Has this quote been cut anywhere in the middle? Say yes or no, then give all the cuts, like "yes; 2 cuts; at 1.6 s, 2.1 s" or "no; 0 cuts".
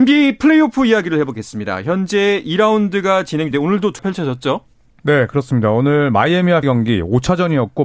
yes; 3 cuts; at 3.5 s, 4.0 s, 6.6 s